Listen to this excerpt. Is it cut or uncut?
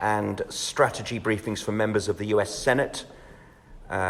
uncut